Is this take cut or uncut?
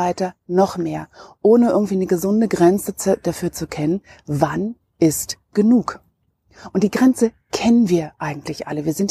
uncut